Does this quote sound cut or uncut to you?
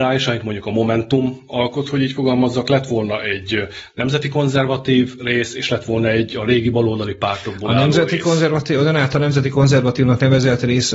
uncut